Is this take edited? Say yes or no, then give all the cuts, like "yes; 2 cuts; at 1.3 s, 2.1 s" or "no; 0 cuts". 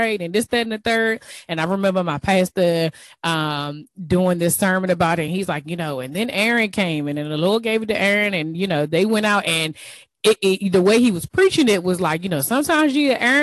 no; 0 cuts